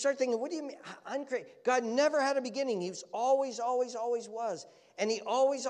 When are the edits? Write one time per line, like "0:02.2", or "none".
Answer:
none